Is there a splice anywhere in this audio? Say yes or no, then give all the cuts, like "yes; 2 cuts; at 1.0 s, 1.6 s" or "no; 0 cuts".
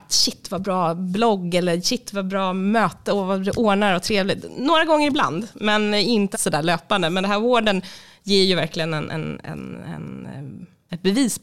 yes; 1 cut; at 6.3 s